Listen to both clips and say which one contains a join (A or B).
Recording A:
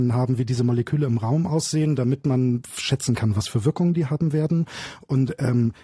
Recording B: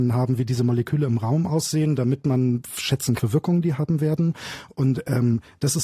B